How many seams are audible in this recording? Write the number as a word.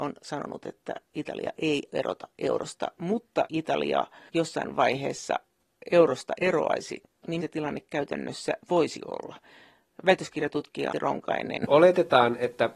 four